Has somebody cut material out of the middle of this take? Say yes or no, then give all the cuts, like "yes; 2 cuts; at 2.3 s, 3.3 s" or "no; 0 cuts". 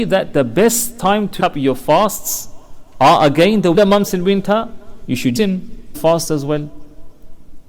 yes; 4 cuts; at 1.4 s, 3.7 s, 5.4 s, 5.9 s